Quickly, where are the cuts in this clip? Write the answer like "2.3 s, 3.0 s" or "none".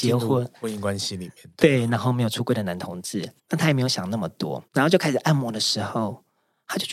3.4 s, 4.7 s